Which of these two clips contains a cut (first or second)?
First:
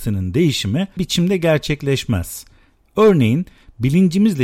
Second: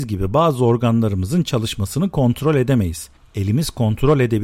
first